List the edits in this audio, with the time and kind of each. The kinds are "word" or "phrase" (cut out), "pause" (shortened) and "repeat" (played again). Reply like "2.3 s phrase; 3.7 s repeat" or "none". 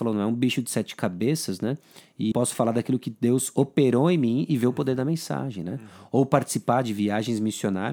2.3 s word